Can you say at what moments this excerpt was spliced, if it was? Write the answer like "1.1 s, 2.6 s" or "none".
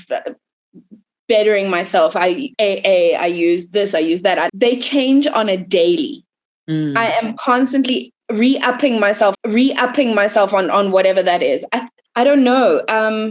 2.5 s, 4.5 s, 9.3 s, 12.1 s

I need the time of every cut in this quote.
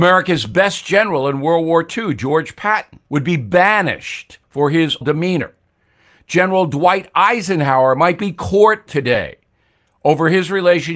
3.0 s, 4.4 s, 5.0 s, 8.9 s

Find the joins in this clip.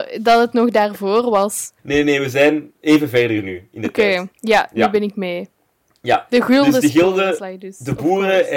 1.8 s, 2.8 s, 4.3 s

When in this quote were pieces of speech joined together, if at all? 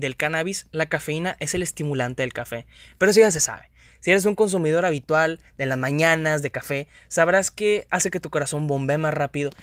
none

